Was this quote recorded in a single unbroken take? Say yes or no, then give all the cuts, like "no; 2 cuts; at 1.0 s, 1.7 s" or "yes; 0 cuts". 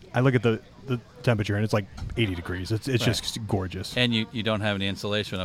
yes; 0 cuts